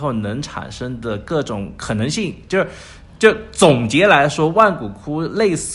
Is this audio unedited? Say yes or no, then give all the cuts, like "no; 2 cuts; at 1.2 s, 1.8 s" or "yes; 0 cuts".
yes; 0 cuts